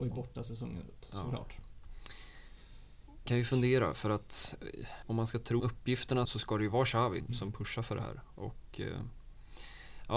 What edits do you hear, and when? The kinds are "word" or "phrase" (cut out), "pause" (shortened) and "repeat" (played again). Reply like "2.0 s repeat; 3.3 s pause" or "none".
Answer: 3.3 s word; 5.0 s word; 5.6 s word; 6.2 s word; 7.2 s word